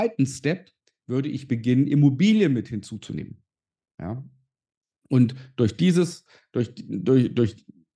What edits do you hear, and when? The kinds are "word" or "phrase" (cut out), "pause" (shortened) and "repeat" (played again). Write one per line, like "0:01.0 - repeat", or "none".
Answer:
none